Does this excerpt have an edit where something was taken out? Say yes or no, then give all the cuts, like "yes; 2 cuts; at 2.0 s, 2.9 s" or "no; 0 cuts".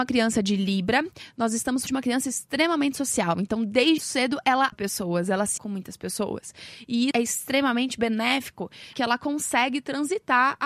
yes; 6 cuts; at 1.9 s, 4.0 s, 4.7 s, 5.6 s, 7.1 s, 8.9 s